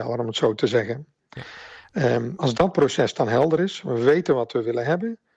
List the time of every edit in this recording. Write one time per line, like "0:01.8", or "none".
none